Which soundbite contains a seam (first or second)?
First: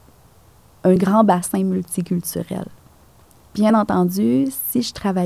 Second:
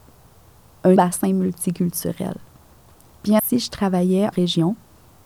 second